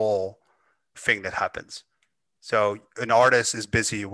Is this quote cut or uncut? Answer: cut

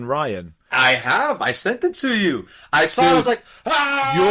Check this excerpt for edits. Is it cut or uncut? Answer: uncut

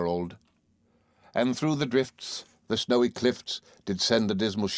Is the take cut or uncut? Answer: uncut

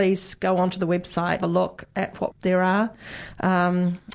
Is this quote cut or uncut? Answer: cut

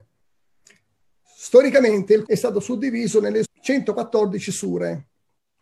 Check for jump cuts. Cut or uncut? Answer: cut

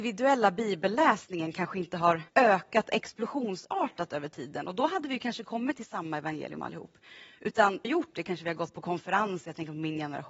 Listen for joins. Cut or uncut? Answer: cut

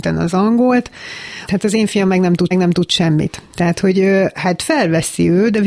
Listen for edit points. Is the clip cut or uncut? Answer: cut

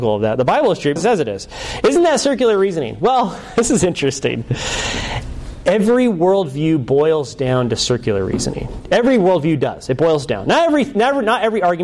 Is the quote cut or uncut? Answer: cut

